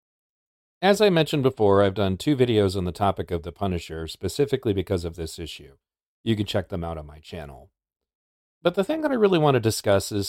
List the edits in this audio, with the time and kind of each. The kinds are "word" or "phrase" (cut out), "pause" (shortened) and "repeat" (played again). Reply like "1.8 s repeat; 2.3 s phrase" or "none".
none